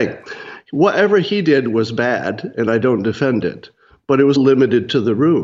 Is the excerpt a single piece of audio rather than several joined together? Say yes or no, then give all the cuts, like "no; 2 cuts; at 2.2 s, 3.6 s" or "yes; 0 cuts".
no; 1 cut; at 4.4 s